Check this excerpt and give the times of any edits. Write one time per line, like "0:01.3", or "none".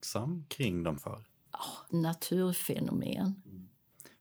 0:01.0
0:01.9